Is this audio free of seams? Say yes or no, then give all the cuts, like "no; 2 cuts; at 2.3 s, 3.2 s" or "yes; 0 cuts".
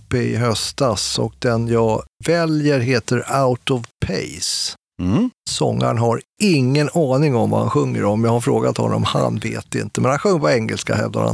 yes; 0 cuts